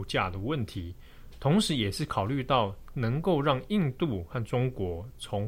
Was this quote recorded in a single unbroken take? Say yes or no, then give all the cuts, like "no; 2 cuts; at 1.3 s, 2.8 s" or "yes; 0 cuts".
yes; 0 cuts